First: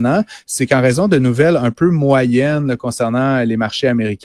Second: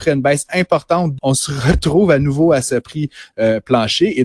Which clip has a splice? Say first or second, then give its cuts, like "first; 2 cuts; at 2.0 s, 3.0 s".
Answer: second; 1 cut; at 1.2 s